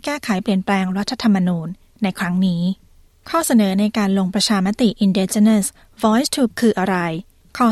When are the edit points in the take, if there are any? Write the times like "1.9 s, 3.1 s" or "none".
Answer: 6.5 s